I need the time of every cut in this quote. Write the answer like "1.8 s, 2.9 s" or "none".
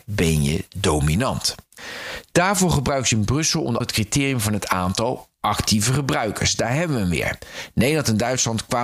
3.8 s